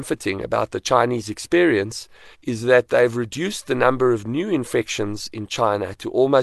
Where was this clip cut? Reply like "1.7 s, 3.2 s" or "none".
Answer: 2.3 s